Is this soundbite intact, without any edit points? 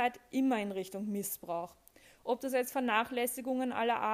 yes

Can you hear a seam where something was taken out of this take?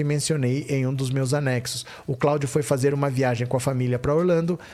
no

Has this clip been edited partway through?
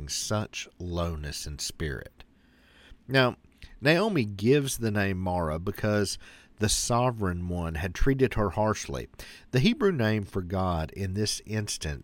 no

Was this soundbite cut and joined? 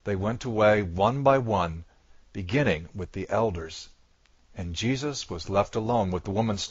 no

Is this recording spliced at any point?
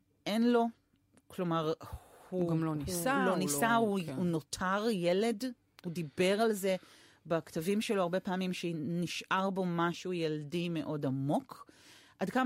no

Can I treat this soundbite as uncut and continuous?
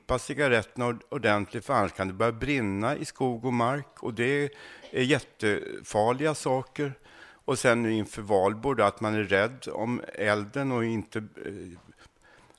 yes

